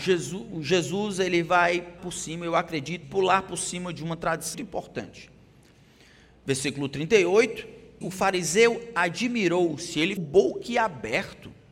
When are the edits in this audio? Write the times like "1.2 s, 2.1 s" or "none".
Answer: 2.0 s, 3.0 s, 4.5 s, 8.0 s, 10.2 s